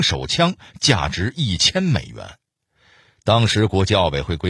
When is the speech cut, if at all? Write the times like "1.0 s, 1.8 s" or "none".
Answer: none